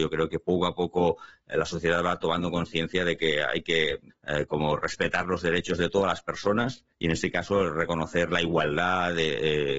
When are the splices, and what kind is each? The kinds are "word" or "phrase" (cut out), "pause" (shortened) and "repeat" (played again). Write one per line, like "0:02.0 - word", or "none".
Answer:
0:06.9 - pause